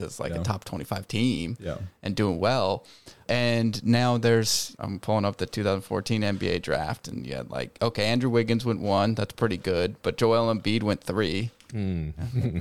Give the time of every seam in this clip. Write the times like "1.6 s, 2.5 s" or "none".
none

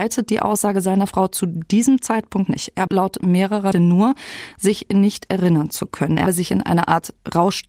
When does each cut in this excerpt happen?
2.5 s, 2.9 s, 3.7 s, 6.3 s

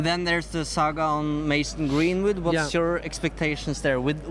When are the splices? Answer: none

